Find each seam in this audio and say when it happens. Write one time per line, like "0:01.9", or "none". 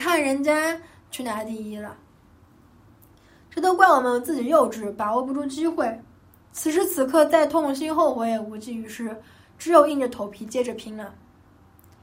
none